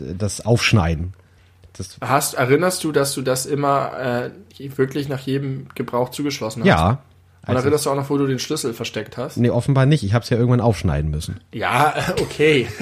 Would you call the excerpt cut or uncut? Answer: uncut